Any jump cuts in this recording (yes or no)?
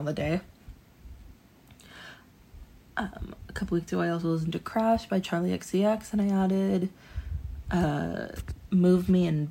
no